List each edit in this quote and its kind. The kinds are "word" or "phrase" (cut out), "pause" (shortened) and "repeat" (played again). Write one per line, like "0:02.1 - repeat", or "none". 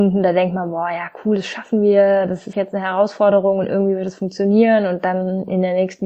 0:02.5 - word